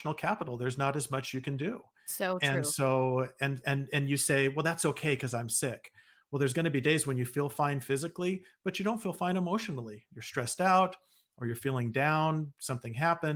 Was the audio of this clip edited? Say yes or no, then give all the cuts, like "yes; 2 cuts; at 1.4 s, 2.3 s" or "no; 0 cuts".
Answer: no; 0 cuts